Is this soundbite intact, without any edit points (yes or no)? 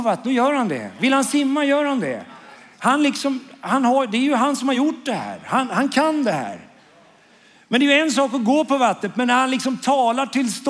yes